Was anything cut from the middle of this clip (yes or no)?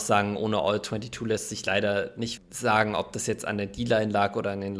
yes